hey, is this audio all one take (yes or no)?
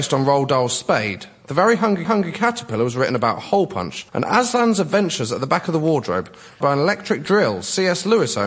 no